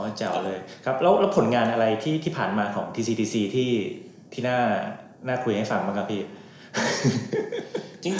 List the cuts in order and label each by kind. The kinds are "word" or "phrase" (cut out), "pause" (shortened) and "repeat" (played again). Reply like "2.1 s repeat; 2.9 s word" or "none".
none